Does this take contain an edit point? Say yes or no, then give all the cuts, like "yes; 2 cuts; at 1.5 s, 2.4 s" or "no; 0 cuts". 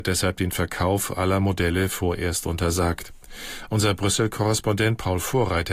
no; 0 cuts